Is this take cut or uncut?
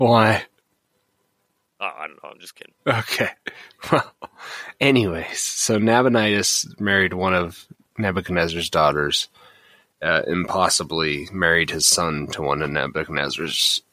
cut